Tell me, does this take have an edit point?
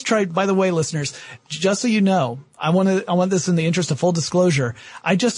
no; 0 cuts

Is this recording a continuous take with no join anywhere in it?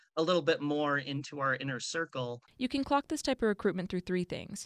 no; 1 cut; at 2.4 s

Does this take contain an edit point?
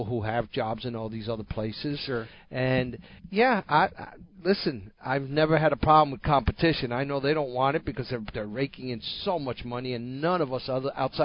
yes; 2 cuts; at 3.2 s, 5.0 s

